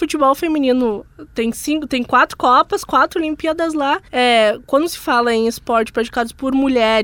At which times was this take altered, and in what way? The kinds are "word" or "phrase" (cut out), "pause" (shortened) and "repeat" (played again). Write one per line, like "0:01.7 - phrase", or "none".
0:04.1 - pause